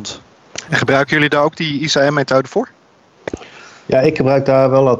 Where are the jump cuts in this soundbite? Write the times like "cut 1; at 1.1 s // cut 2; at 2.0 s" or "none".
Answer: none